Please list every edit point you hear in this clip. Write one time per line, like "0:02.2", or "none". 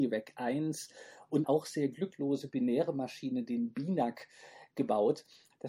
0:01.4